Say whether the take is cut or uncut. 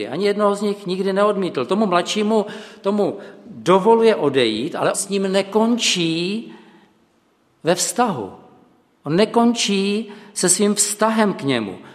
cut